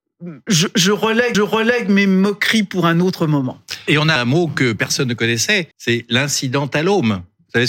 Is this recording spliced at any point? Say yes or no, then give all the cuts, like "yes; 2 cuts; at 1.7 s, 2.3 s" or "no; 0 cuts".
yes; 3 cuts; at 1.3 s, 4.2 s, 5.7 s